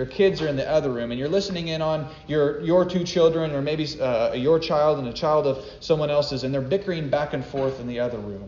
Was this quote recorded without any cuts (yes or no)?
yes